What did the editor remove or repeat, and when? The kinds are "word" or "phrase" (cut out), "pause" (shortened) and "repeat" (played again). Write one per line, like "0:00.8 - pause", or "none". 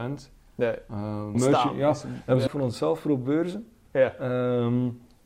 0:01.3 - phrase
0:02.5 - phrase